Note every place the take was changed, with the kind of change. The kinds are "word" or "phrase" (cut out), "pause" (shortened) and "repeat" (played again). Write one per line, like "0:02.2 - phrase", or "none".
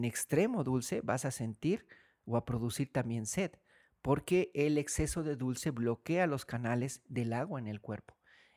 none